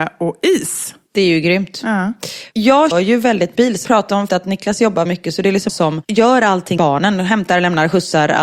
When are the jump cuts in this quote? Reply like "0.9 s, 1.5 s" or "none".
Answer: 2.9 s, 3.5 s, 3.8 s, 4.3 s, 5.0 s, 5.7 s, 6.8 s